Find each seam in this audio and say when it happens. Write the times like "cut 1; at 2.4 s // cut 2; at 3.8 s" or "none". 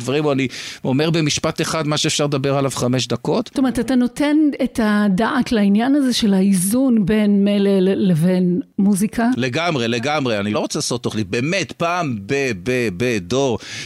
cut 1; at 10.5 s // cut 2; at 12.3 s // cut 3; at 12.6 s